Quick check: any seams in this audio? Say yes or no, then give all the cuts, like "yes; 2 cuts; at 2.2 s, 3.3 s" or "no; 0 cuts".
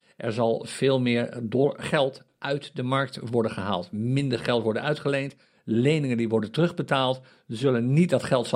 no; 0 cuts